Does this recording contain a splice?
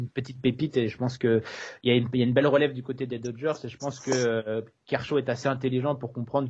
no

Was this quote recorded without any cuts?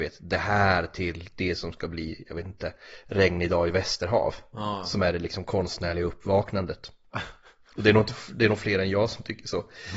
yes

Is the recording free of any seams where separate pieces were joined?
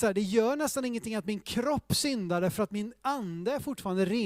yes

